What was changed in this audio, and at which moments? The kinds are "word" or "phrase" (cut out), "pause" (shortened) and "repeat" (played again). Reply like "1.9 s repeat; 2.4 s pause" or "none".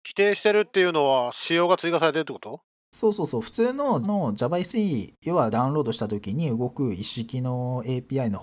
4.0 s word; 5.5 s word